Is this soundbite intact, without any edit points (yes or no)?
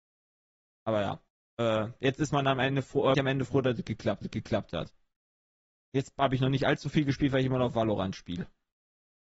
no